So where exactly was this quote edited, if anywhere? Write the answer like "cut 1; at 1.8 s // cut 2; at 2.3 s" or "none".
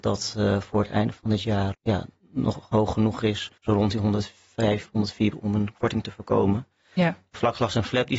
cut 1; at 1.7 s // cut 2; at 3.6 s // cut 3; at 5.3 s